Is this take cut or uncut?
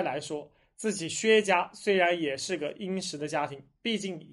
uncut